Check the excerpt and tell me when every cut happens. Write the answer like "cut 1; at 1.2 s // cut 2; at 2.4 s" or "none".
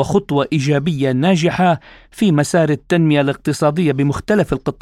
none